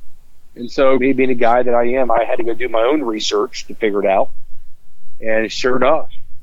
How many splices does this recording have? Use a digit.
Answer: 1